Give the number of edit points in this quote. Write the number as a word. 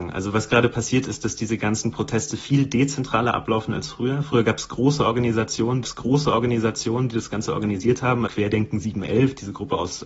two